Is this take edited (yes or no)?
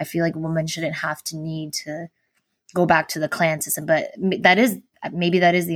no